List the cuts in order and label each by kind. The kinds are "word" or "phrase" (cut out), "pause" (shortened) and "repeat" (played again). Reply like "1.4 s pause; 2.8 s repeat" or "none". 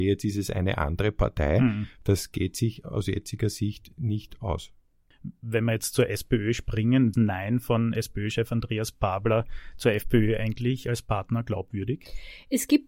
7.1 s phrase